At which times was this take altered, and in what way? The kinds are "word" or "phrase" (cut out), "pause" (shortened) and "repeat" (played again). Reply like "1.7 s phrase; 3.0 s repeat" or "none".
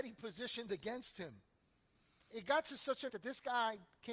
2.3 s word; 3.1 s word